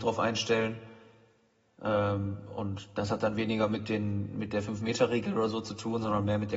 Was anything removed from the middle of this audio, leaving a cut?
no; 0 cuts

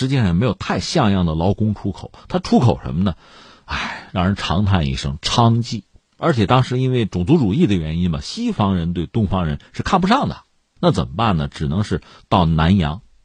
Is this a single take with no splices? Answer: yes; 0 cuts

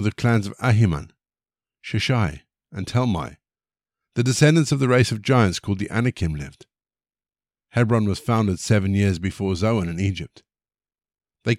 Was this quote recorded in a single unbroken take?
yes; 0 cuts

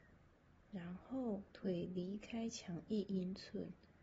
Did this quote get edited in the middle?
yes; 1 cut; at 1.5 s

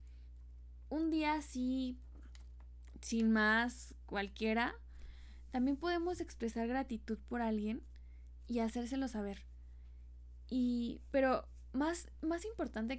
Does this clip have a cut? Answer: no; 0 cuts

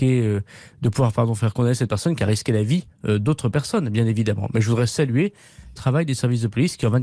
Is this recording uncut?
no; 1 cut; at 5.8 s

